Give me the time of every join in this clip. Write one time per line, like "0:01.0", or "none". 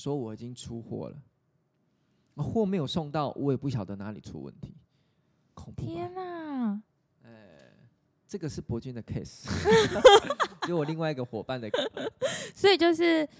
0:11.7